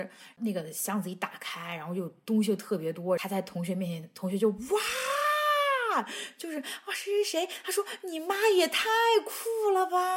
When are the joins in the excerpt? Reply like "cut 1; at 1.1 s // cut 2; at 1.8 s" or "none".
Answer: none